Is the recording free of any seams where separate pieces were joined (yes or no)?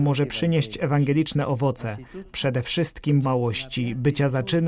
no